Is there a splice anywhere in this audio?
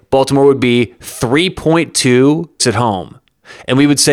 yes; 1 cut; at 2.6 s

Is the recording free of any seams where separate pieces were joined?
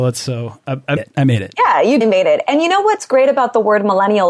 no; 2 cuts; at 1.0 s, 2.0 s

